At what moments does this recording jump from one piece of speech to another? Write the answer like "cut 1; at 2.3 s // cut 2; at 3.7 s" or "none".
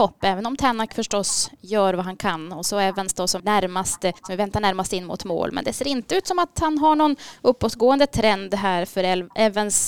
cut 1; at 3.4 s // cut 2; at 4.2 s